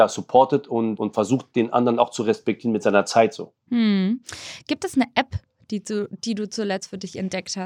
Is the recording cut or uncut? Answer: cut